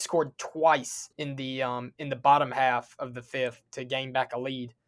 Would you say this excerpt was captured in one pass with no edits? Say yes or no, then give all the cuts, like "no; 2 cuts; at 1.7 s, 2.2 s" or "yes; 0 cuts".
no; 2 cuts; at 1.1 s, 3.7 s